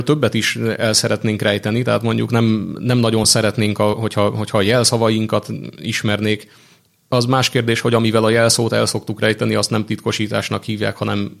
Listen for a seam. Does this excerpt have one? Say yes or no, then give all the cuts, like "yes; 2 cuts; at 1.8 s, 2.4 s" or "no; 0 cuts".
no; 0 cuts